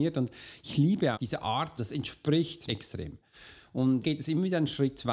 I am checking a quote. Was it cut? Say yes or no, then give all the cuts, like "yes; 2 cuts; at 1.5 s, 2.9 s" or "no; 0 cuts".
yes; 4 cuts; at 1.1 s, 1.8 s, 2.7 s, 4.0 s